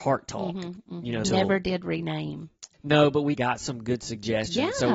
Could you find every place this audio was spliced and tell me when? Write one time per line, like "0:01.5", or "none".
0:01.2
0:02.7
0:03.3